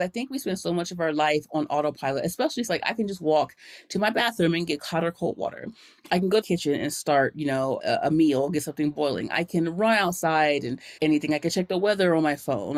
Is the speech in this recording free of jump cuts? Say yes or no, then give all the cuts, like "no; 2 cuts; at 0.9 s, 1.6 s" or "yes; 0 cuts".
no; 4 cuts; at 2.7 s, 6.4 s, 7.8 s, 11.0 s